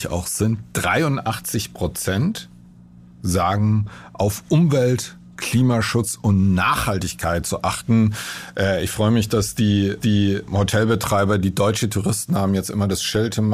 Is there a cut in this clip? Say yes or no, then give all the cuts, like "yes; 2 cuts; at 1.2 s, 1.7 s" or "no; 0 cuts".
yes; 1 cut; at 10.0 s